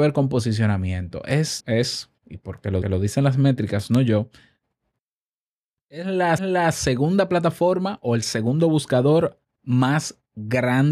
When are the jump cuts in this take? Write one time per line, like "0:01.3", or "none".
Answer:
0:01.6
0:02.8
0:06.4